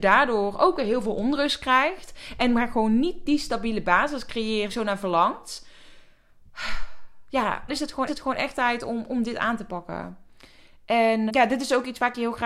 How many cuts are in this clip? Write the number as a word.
four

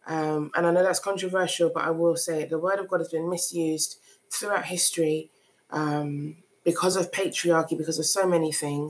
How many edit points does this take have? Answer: zero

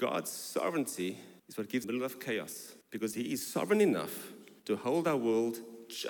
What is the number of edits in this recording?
four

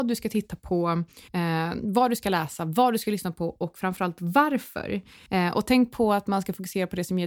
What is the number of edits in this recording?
one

